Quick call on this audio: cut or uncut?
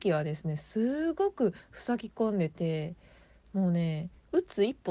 uncut